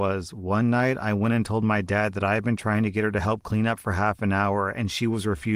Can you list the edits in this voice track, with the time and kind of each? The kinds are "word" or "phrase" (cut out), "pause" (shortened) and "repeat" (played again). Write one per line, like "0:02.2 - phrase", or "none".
none

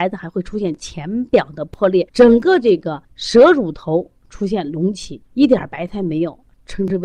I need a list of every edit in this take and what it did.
0:02.1 - pause
0:03.0 - pause
0:05.3 - pause

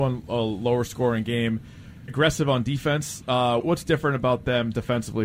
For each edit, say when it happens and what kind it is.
0:02.1 - word
0:03.6 - word

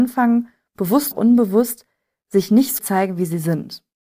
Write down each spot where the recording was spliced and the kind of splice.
0:01.1 - word
0:02.8 - word

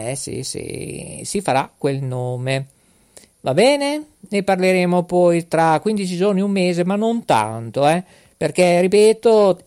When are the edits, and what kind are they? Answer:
none

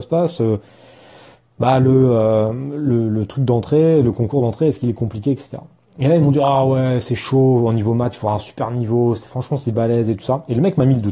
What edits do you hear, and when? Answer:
none

